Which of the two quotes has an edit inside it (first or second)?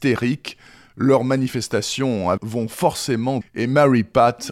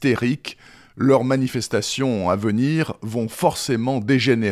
first